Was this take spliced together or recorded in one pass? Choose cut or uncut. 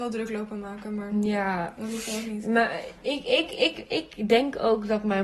uncut